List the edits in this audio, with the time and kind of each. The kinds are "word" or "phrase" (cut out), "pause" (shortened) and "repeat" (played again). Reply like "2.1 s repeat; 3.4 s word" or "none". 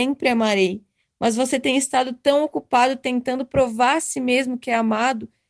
none